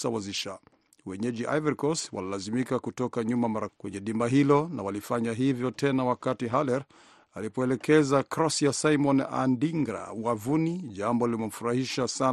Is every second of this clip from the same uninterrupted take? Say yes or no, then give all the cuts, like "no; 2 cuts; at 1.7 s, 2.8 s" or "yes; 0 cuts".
no; 1 cut; at 3.7 s